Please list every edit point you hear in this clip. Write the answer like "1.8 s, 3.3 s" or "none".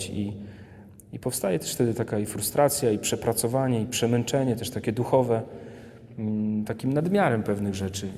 6.6 s